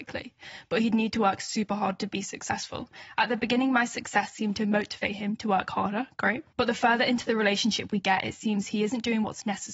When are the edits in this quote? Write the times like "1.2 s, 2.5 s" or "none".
6.5 s

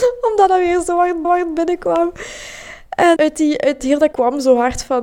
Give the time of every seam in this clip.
1.2 s, 3.2 s, 3.8 s, 4.1 s

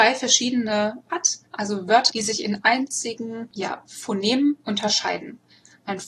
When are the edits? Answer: 1.1 s, 1.5 s, 2.1 s, 2.6 s

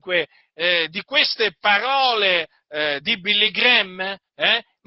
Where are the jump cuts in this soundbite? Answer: 3.0 s

